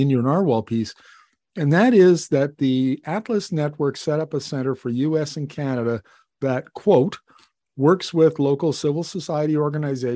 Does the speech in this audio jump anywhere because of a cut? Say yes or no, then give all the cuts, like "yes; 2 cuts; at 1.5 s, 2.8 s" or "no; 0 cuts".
no; 0 cuts